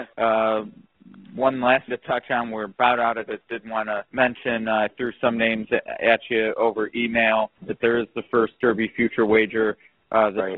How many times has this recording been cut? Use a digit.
4